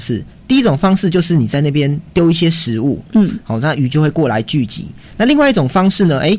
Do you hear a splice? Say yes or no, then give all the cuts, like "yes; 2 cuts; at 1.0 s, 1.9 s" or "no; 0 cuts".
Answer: no; 0 cuts